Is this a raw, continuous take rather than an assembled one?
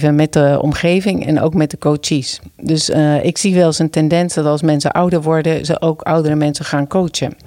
yes; 0 cuts

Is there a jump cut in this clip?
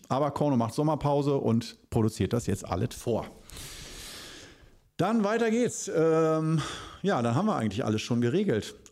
no; 0 cuts

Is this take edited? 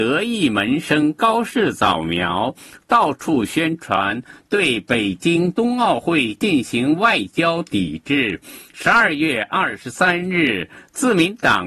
no; 0 cuts

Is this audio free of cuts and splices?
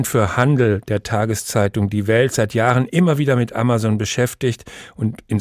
yes; 0 cuts

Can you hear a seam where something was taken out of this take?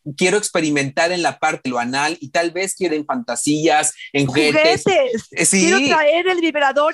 yes; 3 cuts; at 1.7 s, 2.9 s, 4.3 s

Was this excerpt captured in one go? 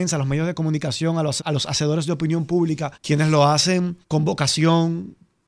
no; 3 cuts; at 1.4 s, 2.9 s, 4.0 s

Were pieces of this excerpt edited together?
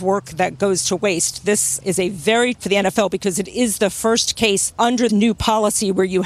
yes; 2 cuts; at 2.5 s, 5.1 s

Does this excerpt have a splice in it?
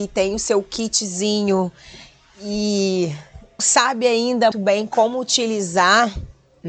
yes; 2 cuts; at 3.6 s, 4.5 s

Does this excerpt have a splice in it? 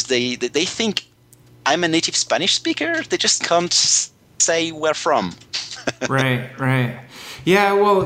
no; 0 cuts

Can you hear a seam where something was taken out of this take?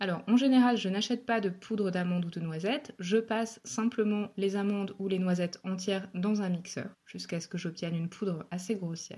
yes; 1 cut; at 6.9 s

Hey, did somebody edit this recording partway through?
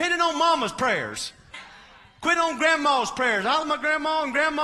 yes; 3 cuts; at 1.5 s, 2.4 s, 3.6 s

